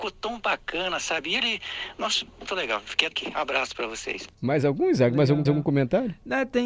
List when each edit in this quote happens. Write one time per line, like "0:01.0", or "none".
0:02.5
0:03.1
0:04.3
0:05.5